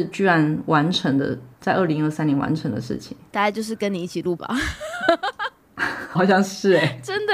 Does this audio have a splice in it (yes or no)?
yes